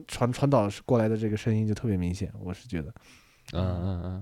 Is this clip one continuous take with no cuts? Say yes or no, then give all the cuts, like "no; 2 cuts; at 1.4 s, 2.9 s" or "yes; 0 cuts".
yes; 0 cuts